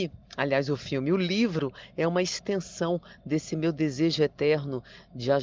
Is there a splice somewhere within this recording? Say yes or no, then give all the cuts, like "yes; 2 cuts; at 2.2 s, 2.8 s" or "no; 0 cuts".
no; 0 cuts